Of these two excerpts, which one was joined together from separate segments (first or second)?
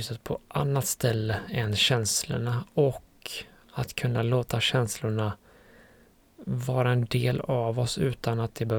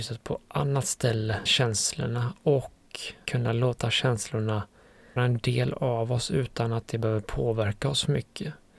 second